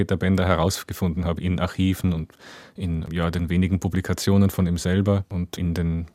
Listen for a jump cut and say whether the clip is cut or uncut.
uncut